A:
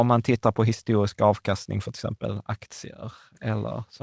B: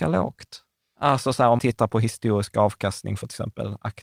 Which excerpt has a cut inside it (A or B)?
B